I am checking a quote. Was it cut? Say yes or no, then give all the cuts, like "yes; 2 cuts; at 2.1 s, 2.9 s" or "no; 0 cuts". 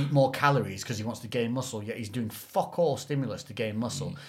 no; 0 cuts